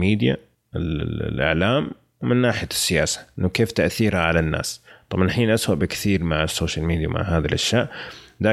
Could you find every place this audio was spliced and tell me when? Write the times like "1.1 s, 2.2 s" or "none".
none